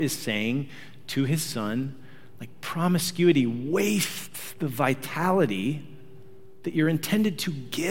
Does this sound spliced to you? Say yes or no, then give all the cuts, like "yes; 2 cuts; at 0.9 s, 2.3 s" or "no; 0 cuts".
no; 0 cuts